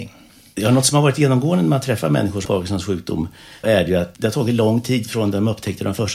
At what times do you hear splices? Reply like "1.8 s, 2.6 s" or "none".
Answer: 2.5 s, 3.6 s, 4.2 s